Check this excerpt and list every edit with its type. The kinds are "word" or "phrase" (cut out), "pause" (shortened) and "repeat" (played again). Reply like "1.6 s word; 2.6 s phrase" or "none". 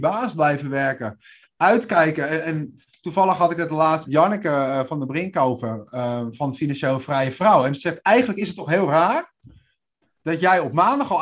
4.1 s phrase